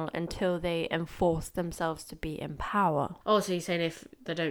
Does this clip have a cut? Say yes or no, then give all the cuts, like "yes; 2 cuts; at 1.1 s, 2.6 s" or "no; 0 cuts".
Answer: yes; 1 cut; at 3.2 s